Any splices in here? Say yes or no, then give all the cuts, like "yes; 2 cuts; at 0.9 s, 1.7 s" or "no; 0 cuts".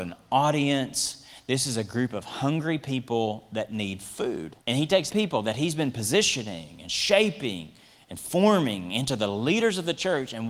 yes; 2 cuts; at 4.6 s, 5.1 s